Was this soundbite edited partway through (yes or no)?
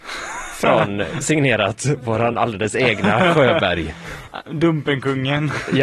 no